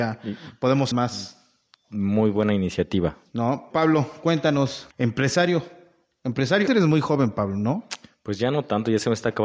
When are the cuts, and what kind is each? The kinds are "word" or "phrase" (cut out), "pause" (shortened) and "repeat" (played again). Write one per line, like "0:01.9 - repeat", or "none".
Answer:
0:00.9 - word
0:03.7 - word
0:04.9 - word
0:06.7 - word